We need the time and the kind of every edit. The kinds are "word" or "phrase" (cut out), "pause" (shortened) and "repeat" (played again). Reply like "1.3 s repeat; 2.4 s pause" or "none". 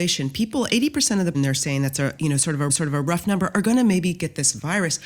1.3 s word; 2.7 s repeat